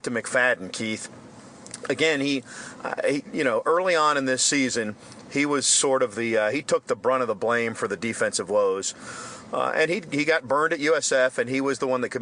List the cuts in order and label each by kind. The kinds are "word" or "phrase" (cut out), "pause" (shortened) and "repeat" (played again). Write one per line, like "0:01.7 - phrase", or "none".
none